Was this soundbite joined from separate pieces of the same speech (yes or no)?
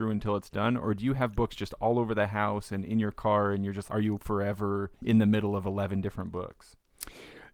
yes